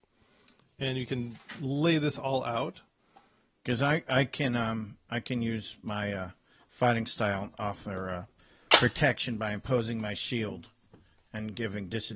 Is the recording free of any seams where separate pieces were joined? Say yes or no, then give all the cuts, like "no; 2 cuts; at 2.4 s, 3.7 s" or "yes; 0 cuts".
yes; 0 cuts